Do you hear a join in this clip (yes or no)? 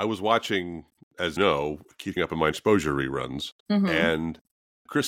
yes